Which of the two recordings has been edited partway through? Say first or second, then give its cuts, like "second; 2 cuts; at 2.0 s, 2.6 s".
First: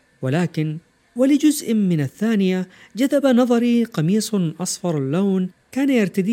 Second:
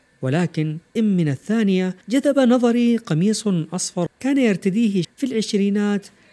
second; 4 cuts; at 1.0 s, 2.0 s, 4.1 s, 5.0 s